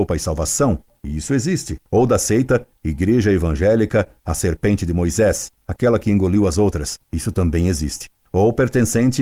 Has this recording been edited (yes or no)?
no